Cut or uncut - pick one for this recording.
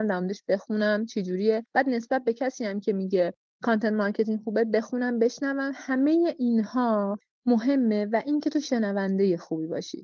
uncut